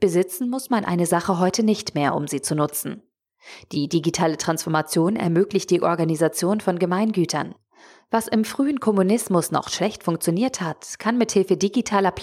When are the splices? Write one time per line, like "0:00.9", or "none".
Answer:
none